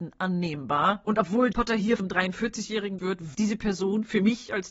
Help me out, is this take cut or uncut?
cut